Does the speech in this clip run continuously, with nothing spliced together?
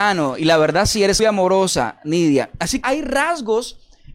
no; 2 cuts; at 1.2 s, 2.8 s

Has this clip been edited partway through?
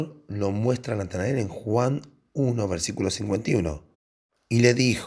no; 0 cuts

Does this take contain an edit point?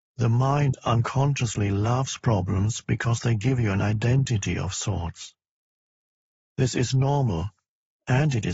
no; 0 cuts

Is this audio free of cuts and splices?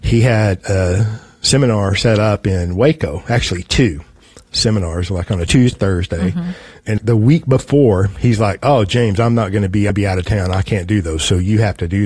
no; 3 cuts; at 5.7 s, 7.0 s, 9.9 s

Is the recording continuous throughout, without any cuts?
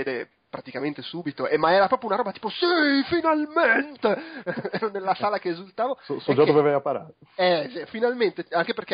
yes; 0 cuts

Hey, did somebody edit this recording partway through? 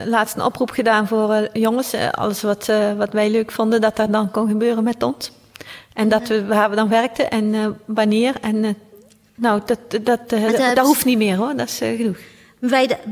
no; 0 cuts

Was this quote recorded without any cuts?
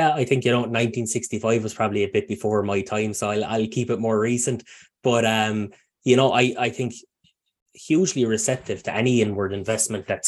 yes; 0 cuts

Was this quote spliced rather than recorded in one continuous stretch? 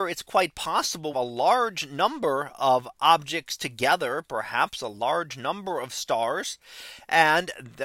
yes; 1 cut; at 1.1 s

